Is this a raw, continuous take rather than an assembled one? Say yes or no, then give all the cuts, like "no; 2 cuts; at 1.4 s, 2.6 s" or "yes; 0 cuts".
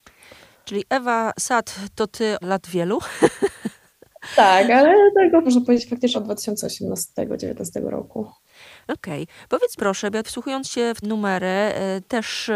no; 6 cuts; at 2.4 s, 5.4 s, 6.1 s, 9.8 s, 10.2 s, 11.0 s